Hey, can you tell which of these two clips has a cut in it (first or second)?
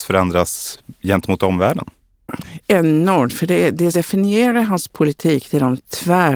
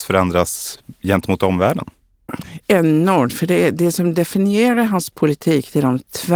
first